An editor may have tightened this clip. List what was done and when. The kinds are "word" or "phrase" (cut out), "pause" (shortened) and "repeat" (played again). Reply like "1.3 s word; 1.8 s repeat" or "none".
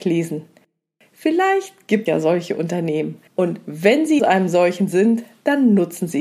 2.1 s word; 3.3 s pause; 4.2 s word